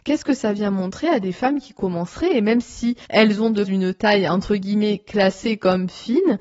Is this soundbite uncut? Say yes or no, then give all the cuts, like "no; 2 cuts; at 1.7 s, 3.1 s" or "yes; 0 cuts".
no; 1 cut; at 3.6 s